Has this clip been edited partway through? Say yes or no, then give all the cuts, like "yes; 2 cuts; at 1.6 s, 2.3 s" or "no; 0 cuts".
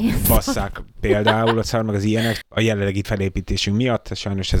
yes; 3 cuts; at 1.6 s, 2.4 s, 3.0 s